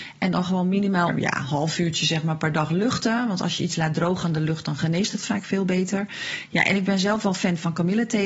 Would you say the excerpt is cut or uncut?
cut